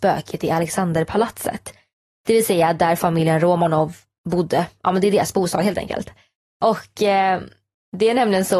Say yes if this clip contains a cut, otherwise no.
no